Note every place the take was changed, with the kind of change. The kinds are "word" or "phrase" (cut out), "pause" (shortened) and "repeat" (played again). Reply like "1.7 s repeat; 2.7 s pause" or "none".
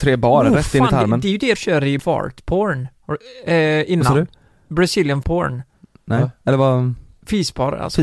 1.5 s word; 2.0 s word; 5.2 s word

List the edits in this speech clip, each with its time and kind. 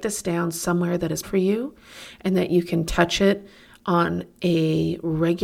1.2 s word

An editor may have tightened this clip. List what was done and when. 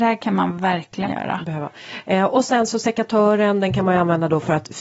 1.0 s word

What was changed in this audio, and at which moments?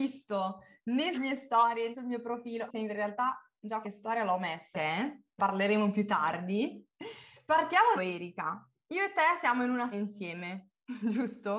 1.1 s word; 1.9 s word; 2.7 s word; 3.8 s word; 4.7 s word; 5.4 s word; 8.0 s word; 9.9 s word

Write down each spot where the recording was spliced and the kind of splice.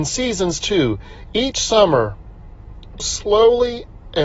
3.0 s phrase

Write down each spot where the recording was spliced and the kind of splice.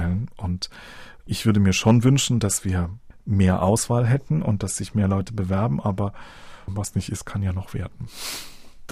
none

